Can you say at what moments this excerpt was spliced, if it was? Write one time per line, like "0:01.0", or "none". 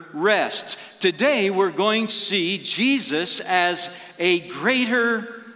0:02.1